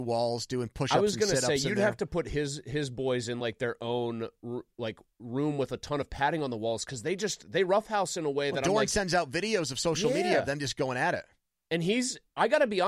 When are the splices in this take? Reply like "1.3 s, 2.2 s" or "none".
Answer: none

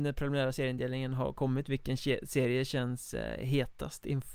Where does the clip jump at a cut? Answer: none

